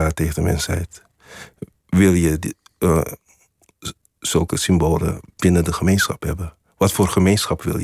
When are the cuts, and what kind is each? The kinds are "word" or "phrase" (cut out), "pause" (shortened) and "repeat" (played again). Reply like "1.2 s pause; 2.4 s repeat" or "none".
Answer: none